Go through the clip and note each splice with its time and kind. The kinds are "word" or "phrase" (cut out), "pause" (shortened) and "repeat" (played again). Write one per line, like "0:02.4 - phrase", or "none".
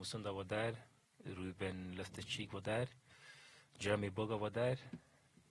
none